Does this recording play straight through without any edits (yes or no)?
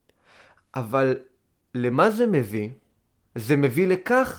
yes